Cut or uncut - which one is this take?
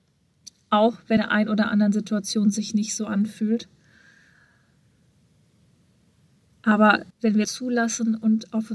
cut